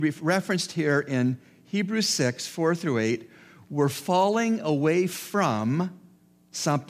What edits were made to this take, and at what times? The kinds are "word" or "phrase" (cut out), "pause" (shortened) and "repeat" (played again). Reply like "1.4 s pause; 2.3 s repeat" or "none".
none